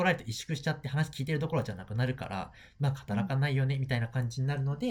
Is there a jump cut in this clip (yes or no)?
no